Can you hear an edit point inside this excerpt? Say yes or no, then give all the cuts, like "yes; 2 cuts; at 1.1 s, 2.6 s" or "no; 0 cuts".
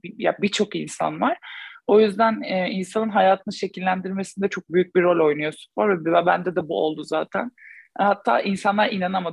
no; 0 cuts